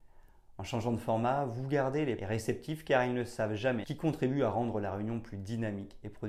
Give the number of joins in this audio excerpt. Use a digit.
2